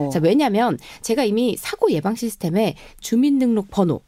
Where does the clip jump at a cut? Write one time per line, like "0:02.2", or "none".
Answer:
0:03.0